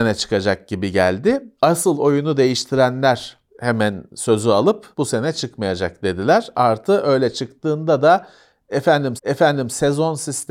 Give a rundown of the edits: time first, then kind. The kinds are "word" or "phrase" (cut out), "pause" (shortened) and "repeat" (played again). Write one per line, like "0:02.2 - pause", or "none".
0:01.6 - pause
0:03.5 - pause
0:04.9 - pause
0:09.2 - repeat